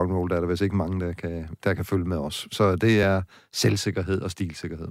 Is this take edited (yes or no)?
no